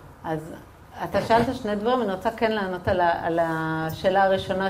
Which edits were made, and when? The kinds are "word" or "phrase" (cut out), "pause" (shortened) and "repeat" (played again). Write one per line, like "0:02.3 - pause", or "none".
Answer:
none